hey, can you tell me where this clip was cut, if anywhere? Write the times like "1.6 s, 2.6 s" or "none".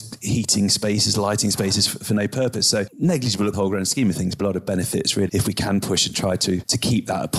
3.5 s, 4.4 s, 5.3 s